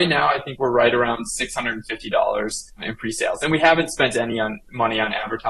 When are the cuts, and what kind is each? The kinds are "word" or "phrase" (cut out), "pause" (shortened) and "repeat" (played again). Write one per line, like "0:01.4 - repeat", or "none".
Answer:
none